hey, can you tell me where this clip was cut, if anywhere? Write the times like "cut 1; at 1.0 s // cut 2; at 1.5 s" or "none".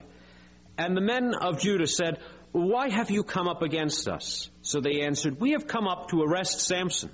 cut 1; at 2.4 s // cut 2; at 4.6 s